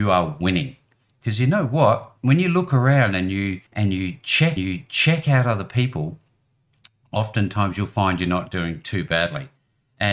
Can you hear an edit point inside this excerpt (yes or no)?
yes